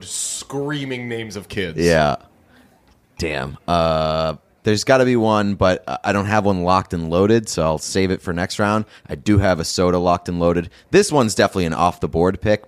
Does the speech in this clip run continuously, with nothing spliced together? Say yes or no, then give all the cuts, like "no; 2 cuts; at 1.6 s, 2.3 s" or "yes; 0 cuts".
yes; 0 cuts